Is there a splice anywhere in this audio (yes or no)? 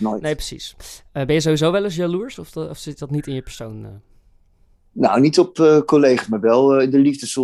no